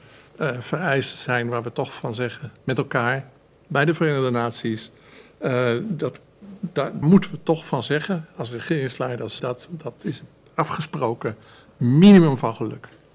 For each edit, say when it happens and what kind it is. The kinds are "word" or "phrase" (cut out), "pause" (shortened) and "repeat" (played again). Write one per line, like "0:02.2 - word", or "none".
0:07.0 - word
0:09.4 - word
0:10.5 - word